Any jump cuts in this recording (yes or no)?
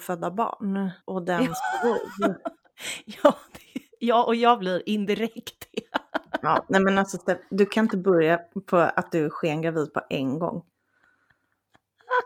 yes